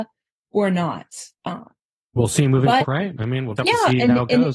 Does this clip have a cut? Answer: yes; 3 cuts; at 1.3 s, 2.8 s, 3.6 s

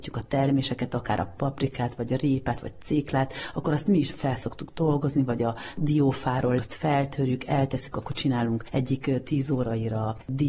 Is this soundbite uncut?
no; 2 cuts; at 1.4 s, 6.6 s

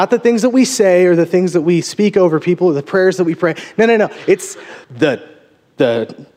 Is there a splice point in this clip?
yes; 1 cut; at 4.8 s

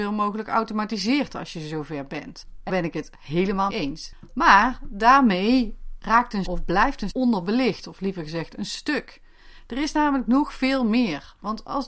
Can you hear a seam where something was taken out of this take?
yes; 4 cuts; at 2.7 s, 3.7 s, 6.4 s, 7.1 s

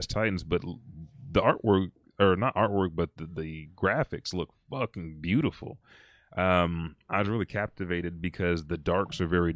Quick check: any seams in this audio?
no; 0 cuts

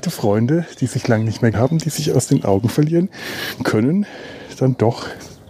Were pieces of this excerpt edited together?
yes; 1 cut; at 1.5 s

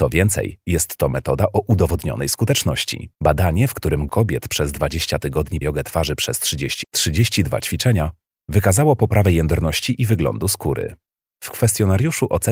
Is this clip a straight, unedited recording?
no; 4 cuts; at 3.1 s, 4.1 s, 5.6 s, 6.8 s

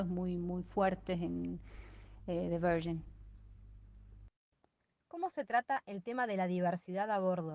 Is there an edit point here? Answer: no; 0 cuts

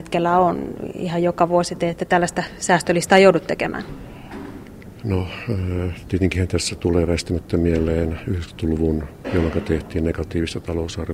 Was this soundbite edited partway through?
yes; 1 cut; at 9.2 s

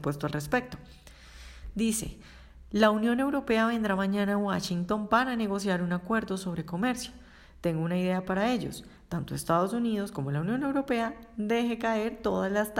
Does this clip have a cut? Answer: no; 0 cuts

